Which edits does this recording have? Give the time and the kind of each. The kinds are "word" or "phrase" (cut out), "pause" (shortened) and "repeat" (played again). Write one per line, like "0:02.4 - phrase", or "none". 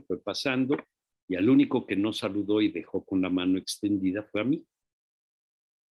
none